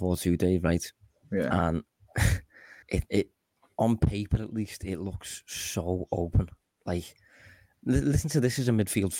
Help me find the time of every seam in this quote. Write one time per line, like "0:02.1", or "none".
0:02.8

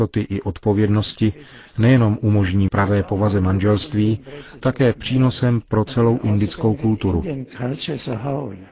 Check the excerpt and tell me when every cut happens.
0:02.7
0:04.6

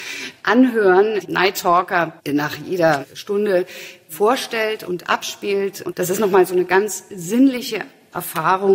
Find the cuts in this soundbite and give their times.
0:01.2
0:02.2
0:05.9

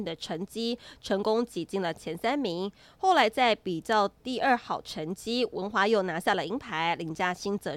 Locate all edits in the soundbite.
none

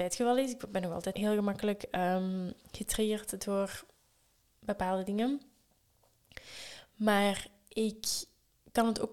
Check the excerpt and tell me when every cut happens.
0:01.1

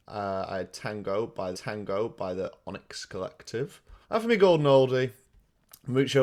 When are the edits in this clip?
0:01.5
0:04.0

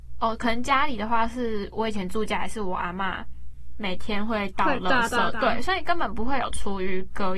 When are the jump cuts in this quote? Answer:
none

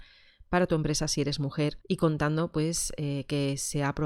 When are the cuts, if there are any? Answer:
0:01.8

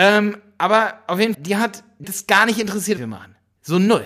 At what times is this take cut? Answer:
0:01.3
0:02.0
0:03.0

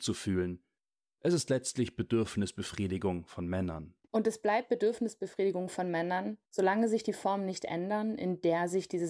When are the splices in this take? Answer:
0:04.0

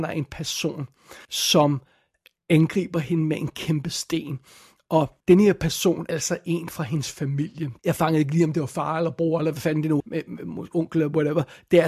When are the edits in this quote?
0:01.2
0:05.2
0:06.1
0:07.8
0:10.0

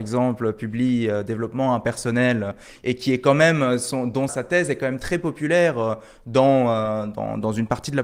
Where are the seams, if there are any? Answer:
0:04.3

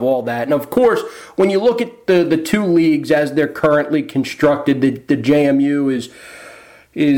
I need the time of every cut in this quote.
none

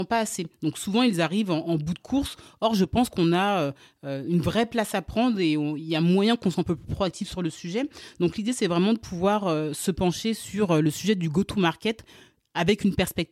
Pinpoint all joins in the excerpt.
none

